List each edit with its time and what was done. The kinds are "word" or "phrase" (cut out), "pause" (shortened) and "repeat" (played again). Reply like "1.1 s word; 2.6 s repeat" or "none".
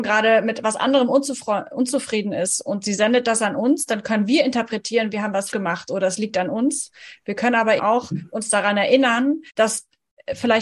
5.5 s word; 7.8 s word; 9.5 s pause

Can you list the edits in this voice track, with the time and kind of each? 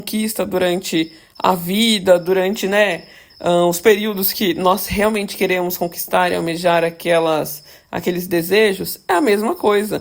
none

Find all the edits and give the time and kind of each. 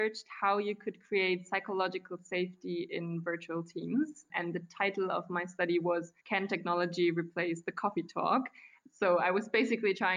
6.2 s pause

